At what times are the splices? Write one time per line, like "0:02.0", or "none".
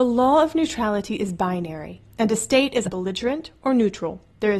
0:02.8

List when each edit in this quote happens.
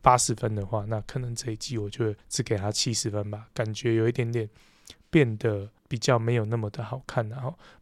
0:02.2
0:05.8

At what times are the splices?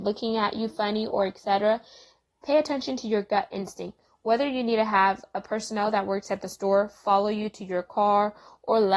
none

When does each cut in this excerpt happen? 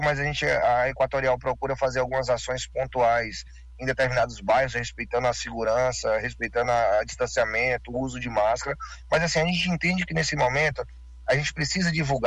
none

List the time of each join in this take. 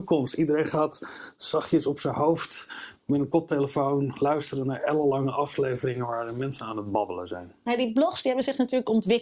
none

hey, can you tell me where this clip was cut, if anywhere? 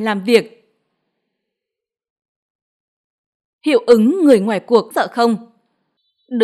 0:04.9

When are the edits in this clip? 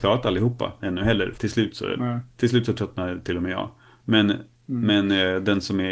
0:01.4

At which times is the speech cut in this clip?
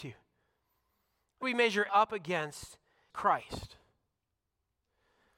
0:01.4
0:01.9
0:03.1

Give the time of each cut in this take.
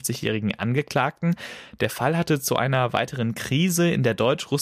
none

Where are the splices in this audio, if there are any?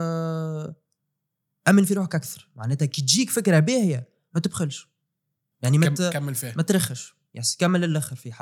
none

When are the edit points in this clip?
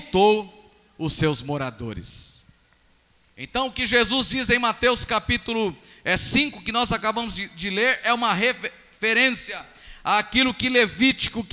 none

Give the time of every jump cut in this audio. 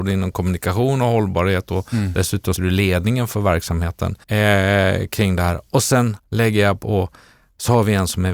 0:02.6
0:04.2
0:06.2

